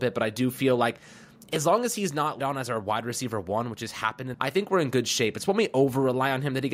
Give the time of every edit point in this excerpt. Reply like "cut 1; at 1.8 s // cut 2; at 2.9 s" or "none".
cut 1; at 2.4 s // cut 2; at 4.3 s